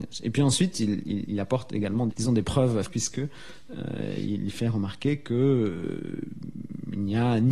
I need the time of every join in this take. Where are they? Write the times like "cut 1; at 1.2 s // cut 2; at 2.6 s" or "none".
cut 1; at 1.3 s // cut 2; at 2.1 s // cut 3; at 2.8 s